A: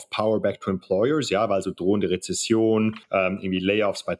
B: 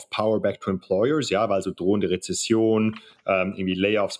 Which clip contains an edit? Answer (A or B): A